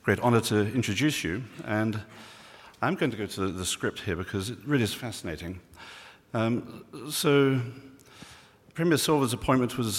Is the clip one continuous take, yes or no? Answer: yes